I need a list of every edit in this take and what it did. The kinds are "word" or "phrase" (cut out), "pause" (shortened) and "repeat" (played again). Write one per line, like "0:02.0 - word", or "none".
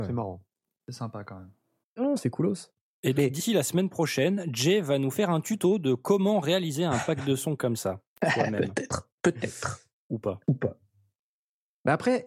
0:01.8 - pause
0:03.2 - word
0:09.2 - pause
0:10.4 - pause